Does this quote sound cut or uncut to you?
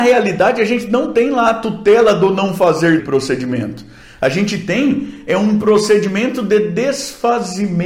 cut